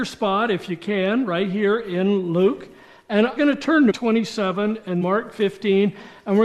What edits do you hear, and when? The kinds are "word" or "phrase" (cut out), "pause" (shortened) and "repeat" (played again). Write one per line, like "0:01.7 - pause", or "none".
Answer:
0:03.4 - word
0:03.9 - phrase
0:05.0 - word

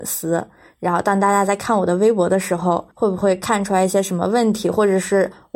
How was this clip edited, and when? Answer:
0:02.9 - pause

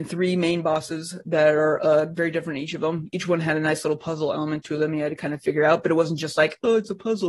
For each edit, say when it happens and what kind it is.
none

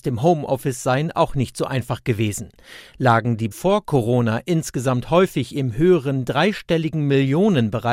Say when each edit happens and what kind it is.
0:03.5 - word

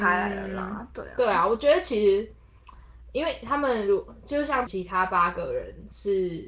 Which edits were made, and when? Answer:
0:04.7 - word

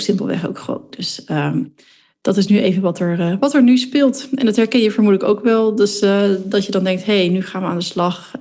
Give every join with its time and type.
none

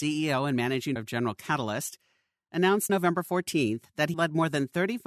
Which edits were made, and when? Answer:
0:01.0 - word
0:02.9 - word
0:04.1 - word

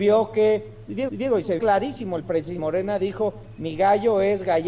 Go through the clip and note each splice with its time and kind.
0:01.1 - repeat
0:01.6 - word
0:02.6 - phrase

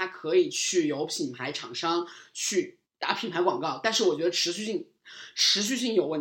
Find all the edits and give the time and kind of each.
0:02.8 - pause

